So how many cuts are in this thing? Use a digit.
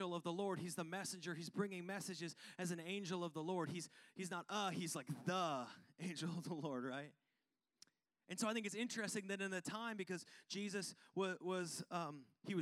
0